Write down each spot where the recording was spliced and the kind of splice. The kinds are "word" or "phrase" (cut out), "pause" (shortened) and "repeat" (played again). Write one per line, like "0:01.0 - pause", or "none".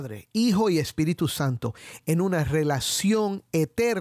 none